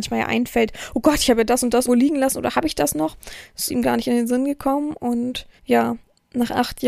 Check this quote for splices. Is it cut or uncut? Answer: cut